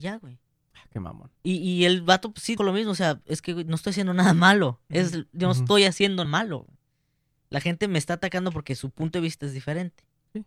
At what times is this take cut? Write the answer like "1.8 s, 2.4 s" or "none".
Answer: 1.4 s, 2.6 s, 6.3 s